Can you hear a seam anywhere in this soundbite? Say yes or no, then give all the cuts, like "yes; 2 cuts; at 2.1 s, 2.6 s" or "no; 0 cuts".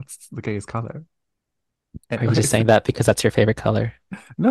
yes; 1 cut; at 2.0 s